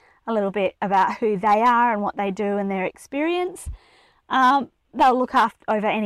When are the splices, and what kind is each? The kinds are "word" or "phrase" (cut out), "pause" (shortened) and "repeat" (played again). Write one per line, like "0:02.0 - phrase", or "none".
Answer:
none